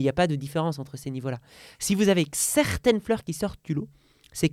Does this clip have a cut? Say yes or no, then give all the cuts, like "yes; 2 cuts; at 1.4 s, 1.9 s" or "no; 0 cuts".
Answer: no; 0 cuts